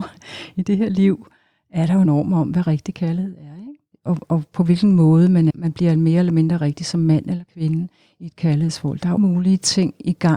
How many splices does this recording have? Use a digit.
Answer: 3